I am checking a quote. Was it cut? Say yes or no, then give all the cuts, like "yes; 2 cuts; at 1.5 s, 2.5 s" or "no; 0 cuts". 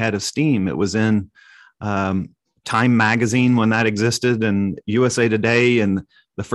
no; 0 cuts